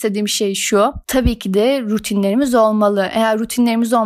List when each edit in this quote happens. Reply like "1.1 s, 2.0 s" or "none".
1.0 s